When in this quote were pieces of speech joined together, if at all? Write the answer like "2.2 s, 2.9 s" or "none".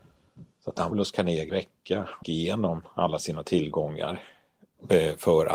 0.9 s, 1.5 s, 2.2 s